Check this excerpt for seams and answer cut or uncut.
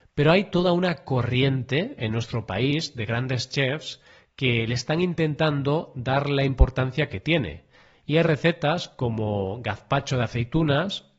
uncut